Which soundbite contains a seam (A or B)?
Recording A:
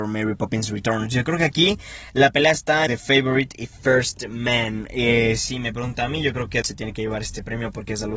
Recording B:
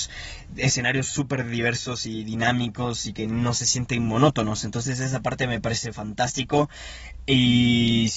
A